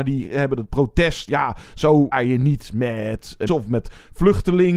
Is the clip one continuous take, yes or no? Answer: no